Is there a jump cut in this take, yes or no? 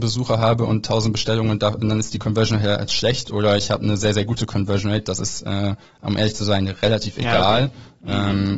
no